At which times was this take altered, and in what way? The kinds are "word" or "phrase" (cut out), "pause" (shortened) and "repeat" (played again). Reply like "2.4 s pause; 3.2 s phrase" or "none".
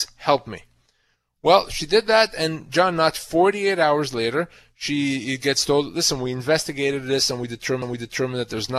7.8 s repeat